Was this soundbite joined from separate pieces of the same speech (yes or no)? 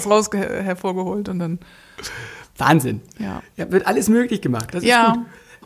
no